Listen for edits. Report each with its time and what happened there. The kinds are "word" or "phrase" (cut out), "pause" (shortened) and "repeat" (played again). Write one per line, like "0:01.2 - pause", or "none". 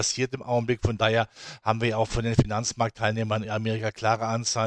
none